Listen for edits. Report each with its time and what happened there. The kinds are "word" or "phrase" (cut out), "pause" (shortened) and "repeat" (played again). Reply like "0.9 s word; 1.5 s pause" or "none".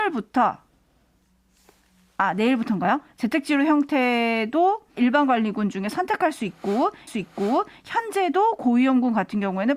5.0 s word; 7.1 s repeat